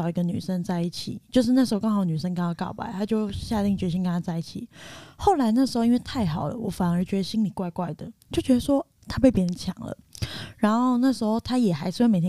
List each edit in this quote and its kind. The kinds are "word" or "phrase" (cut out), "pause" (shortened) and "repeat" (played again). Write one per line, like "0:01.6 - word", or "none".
0:08.2 - pause

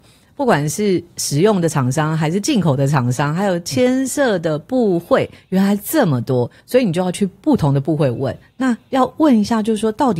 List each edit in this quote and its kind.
0:06.6 - pause

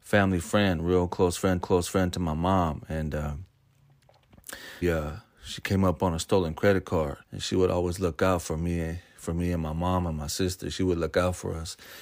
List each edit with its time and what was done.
0:01.6 - repeat
0:04.8 - word
0:07.2 - pause

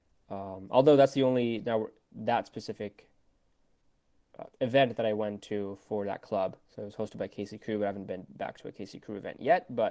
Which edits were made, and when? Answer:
0:04.5 - pause

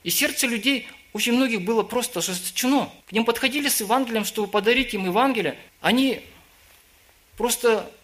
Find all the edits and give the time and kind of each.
0:03.0 - pause
0:05.7 - pause

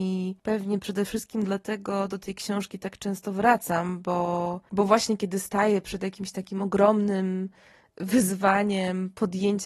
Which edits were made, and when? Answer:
none

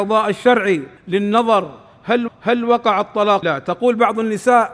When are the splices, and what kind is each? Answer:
0:01.0 - pause
0:02.3 - repeat
0:03.4 - word

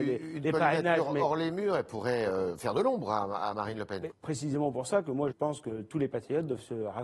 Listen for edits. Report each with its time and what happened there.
0:04.1 - word
0:05.3 - phrase

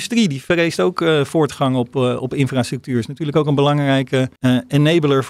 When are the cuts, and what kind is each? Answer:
0:04.4 - pause

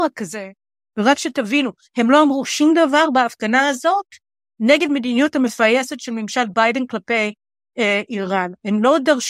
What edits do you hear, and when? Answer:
none

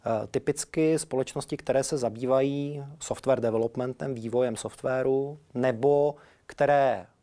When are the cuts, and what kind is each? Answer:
none

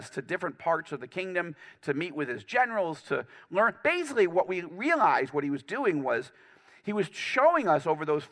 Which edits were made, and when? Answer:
none

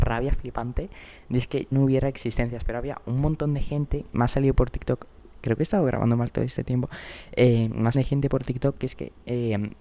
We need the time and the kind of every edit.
0:01.7 - word
0:04.1 - word
0:07.9 - phrase

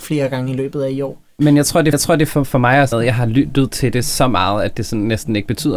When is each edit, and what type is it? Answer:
0:01.9 - repeat
0:02.9 - phrase

